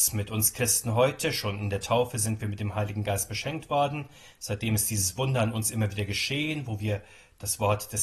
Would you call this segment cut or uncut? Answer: uncut